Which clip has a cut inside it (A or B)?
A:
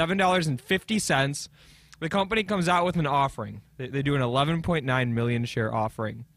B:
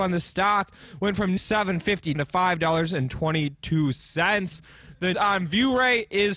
B